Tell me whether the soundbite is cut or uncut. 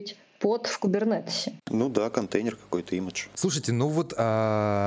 cut